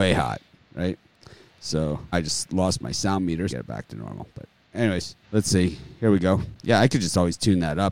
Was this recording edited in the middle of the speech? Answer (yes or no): yes